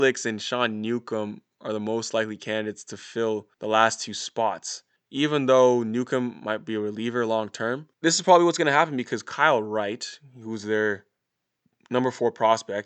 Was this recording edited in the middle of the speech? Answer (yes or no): yes